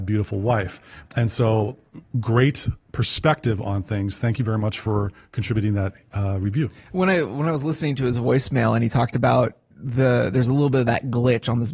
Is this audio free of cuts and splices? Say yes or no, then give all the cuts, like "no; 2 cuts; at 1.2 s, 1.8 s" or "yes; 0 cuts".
yes; 0 cuts